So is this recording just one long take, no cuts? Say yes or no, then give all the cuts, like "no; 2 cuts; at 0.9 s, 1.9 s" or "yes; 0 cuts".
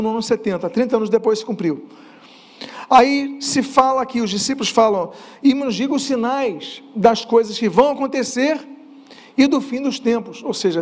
yes; 0 cuts